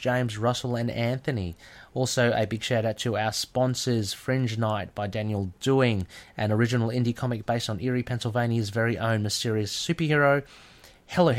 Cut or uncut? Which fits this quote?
uncut